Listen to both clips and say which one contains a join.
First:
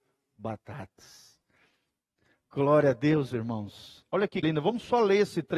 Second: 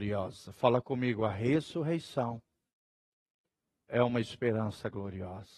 first; 1 cut; at 4.4 s

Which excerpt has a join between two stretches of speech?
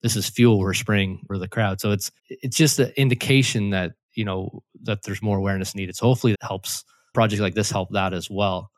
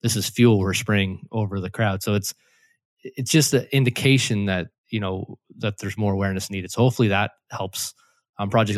first; 4 cuts; at 1.3 s, 2.2 s, 6.3 s, 7.1 s

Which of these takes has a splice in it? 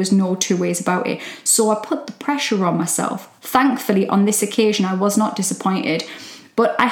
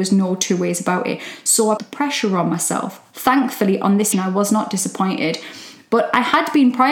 second; 2 cuts; at 1.8 s, 4.1 s

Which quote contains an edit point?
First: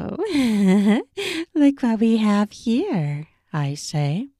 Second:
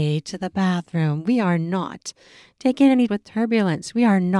second; 1 cut; at 3.1 s

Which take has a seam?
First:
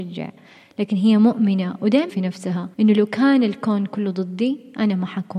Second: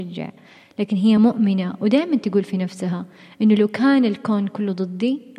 first; 2 cuts; at 2.1 s, 2.7 s

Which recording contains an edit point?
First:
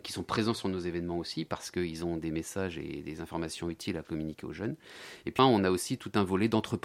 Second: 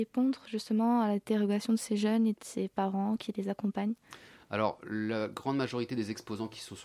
first; 1 cut; at 5.4 s

